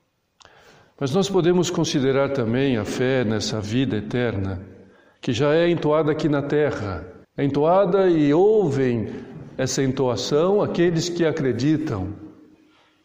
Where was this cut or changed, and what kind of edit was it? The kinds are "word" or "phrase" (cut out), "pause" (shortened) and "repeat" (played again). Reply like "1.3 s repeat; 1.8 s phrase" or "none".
7.2 s pause